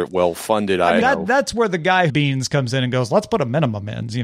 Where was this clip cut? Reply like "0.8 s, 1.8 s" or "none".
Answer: 1.0 s, 2.1 s